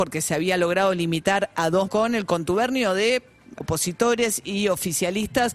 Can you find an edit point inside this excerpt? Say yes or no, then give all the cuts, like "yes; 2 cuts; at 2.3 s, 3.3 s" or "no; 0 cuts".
yes; 2 cuts; at 1.9 s, 3.6 s